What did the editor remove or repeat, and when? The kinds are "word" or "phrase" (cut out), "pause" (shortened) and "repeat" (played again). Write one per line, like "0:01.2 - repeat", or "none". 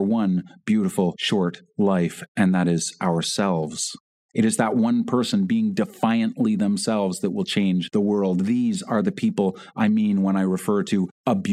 0:02.3 - pause
0:04.2 - pause